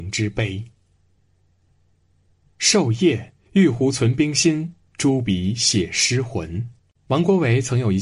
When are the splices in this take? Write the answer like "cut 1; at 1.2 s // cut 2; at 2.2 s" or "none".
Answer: cut 1; at 3.5 s // cut 2; at 6.8 s